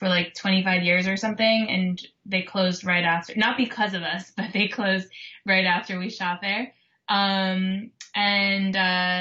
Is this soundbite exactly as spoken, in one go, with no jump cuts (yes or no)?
yes